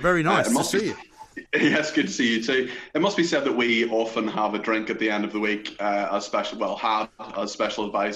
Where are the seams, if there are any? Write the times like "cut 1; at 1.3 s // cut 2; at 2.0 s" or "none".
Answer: cut 1; at 1.5 s